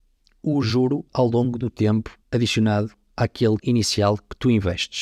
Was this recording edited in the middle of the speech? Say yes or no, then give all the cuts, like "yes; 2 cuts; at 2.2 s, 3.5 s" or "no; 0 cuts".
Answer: yes; 3 cuts; at 1.1 s, 2.2 s, 3.6 s